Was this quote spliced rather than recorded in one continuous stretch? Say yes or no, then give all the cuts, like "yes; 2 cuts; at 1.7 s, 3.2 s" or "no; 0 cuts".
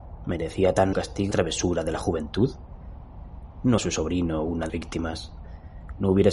yes; 4 cuts; at 0.9 s, 1.3 s, 3.8 s, 4.7 s